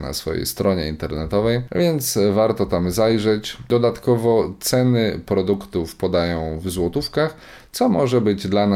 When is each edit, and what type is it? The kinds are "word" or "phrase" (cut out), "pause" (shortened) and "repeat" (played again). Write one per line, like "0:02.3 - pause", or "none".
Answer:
none